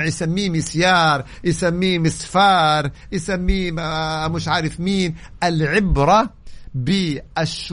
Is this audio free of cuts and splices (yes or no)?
yes